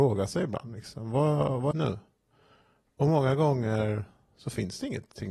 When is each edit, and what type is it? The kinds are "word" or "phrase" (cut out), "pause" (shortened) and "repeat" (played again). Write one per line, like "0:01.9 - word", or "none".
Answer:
0:01.7 - phrase